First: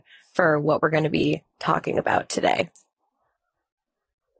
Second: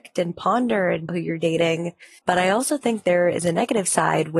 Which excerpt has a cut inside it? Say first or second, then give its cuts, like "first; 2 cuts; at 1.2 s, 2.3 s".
second; 2 cuts; at 1.1 s, 2.2 s